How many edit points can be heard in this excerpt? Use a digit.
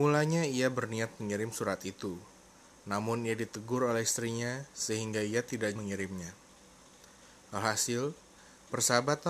1